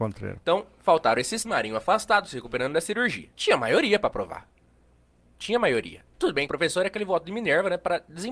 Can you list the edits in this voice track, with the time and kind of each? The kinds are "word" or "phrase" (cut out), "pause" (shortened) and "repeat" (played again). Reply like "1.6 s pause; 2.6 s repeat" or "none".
1.4 s word; 3.3 s pause; 6.5 s phrase